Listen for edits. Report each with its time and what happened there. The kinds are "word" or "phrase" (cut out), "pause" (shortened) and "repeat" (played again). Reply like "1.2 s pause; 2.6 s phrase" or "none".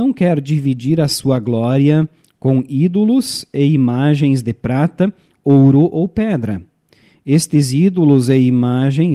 none